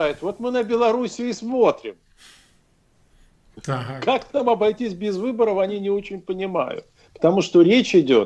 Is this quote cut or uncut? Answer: uncut